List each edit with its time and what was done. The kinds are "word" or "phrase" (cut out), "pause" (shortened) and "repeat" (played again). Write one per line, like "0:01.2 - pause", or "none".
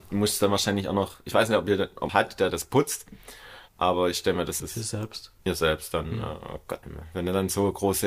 0:02.1 - phrase
0:02.5 - word
0:03.7 - pause
0:04.6 - phrase
0:05.4 - pause
0:06.8 - word

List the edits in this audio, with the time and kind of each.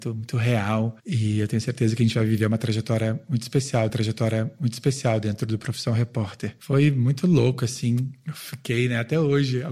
0:03.9 - repeat

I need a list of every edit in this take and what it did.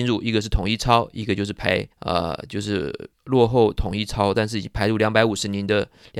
0:01.9 - pause
0:03.1 - pause

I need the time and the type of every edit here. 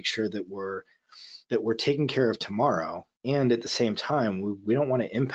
0:01.4 - pause
0:03.1 - pause

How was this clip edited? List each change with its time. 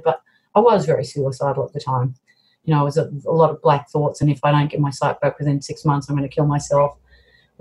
none

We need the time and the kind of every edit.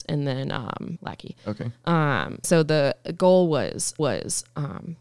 0:01.0 - word
0:02.4 - word
0:04.0 - repeat

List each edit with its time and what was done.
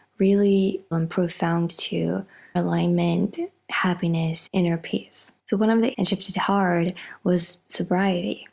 0:00.9 - word
0:01.7 - word
0:02.5 - word
0:04.5 - word
0:05.4 - pause
0:05.9 - phrase

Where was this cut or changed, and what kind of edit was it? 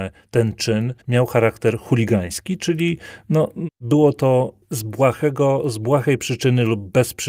0:01.0 - pause

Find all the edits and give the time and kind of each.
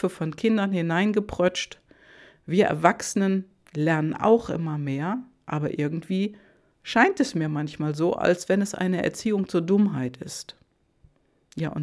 none

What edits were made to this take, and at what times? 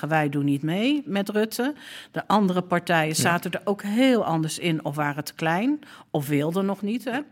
none

